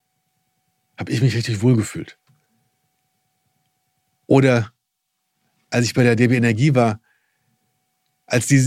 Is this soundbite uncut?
yes; 0 cuts

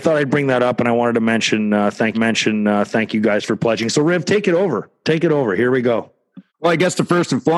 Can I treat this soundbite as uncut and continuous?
no; 2 cuts; at 2.1 s, 6.5 s

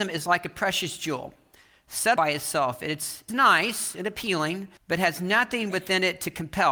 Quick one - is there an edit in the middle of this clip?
yes; 3 cuts; at 2.2 s, 3.3 s, 4.8 s

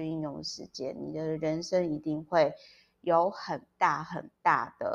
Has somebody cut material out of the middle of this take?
no; 0 cuts

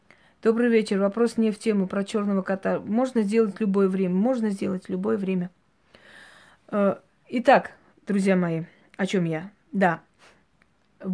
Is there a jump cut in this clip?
no; 0 cuts

